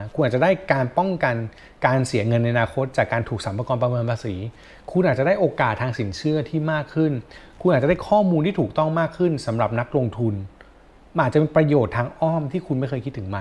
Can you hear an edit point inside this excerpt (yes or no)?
no